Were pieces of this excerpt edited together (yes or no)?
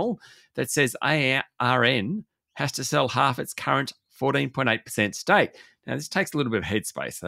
no